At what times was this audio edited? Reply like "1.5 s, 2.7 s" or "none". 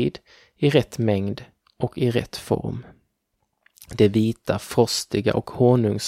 none